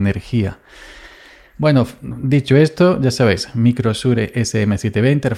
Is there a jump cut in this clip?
no; 0 cuts

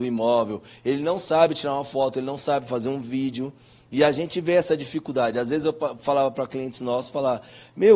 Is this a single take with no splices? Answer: yes; 0 cuts

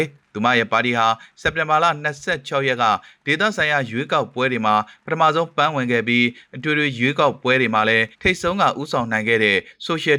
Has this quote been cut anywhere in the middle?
yes; 1 cut; at 8.1 s

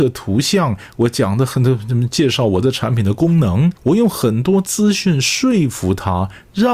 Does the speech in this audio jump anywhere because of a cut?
yes; 1 cut; at 3.8 s

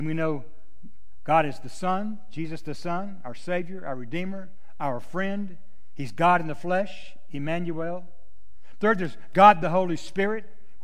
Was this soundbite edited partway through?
no; 0 cuts

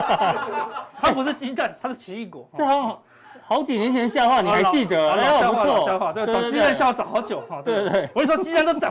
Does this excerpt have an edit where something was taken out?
no; 0 cuts

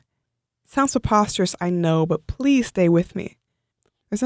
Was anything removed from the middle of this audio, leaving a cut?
no; 0 cuts

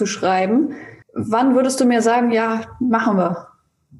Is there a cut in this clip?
yes; 1 cut; at 1.0 s

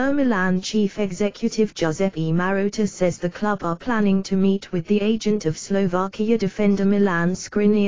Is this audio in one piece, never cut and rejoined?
yes; 0 cuts

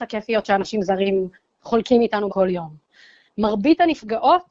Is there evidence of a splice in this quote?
yes; 2 cuts; at 1.3 s, 2.3 s

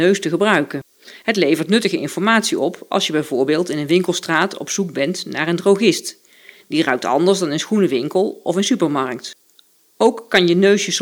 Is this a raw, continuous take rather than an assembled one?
yes; 0 cuts

